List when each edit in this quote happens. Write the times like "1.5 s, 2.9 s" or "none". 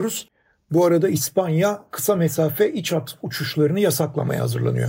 none